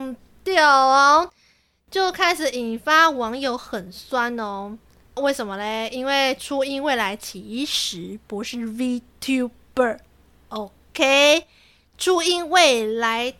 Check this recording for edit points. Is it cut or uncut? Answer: uncut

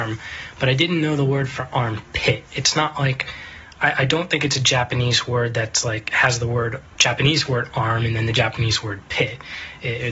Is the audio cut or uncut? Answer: cut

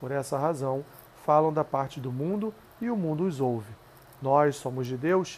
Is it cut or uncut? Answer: uncut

